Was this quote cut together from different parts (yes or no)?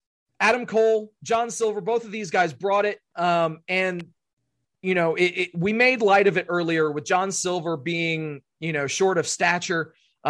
no